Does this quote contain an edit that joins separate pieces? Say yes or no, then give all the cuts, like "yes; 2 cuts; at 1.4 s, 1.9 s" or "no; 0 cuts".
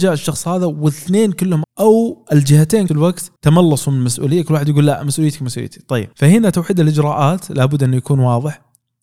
yes; 4 cuts; at 1.6 s, 2.9 s, 3.4 s, 6.1 s